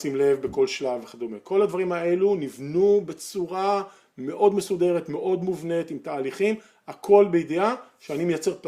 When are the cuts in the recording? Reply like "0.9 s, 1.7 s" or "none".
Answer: none